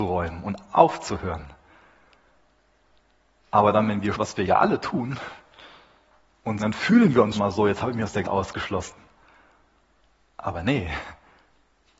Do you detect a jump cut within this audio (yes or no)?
yes